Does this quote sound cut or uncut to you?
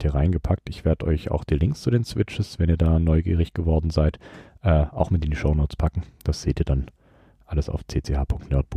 uncut